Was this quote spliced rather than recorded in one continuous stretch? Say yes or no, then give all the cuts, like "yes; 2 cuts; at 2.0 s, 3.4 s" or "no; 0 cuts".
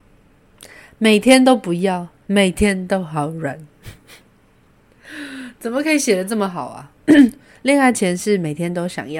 yes; 1 cut; at 4.2 s